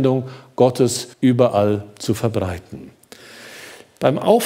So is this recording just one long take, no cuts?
no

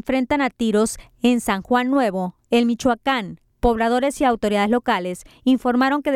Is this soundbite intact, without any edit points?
yes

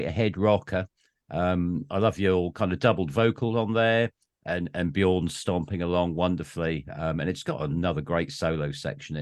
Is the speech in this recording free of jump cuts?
yes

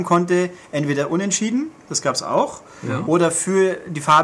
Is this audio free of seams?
yes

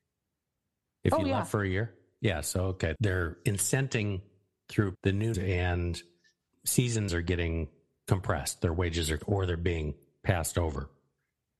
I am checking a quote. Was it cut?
yes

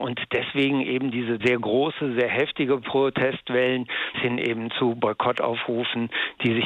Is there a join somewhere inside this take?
yes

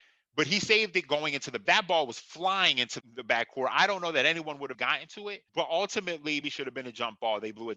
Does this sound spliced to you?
yes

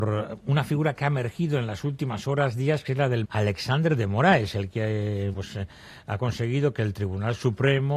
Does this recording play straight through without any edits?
no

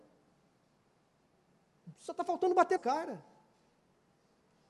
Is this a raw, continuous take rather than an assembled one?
no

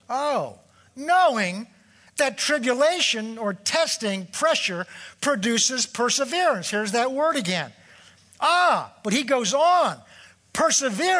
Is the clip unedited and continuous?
yes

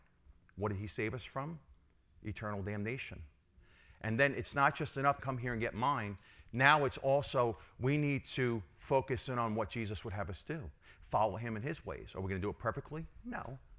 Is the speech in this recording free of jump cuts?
no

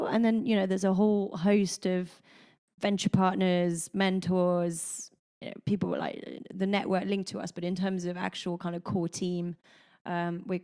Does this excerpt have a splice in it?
no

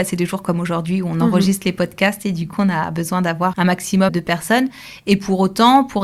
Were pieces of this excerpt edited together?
yes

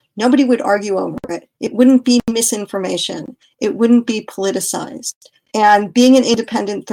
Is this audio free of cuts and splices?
yes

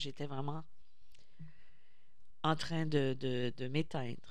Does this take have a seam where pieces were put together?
no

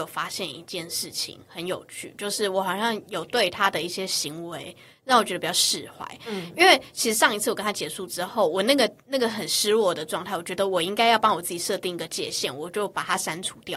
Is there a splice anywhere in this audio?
no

